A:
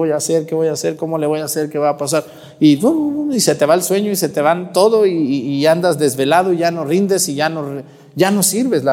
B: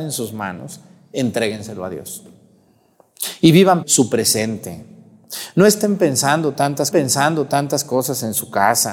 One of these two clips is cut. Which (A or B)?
B